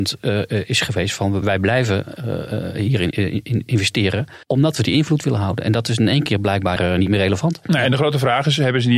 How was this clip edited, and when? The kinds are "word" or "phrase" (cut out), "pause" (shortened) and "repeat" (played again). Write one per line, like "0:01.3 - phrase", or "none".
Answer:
0:01.4 - word
0:03.1 - word
0:04.4 - pause
0:06.8 - phrase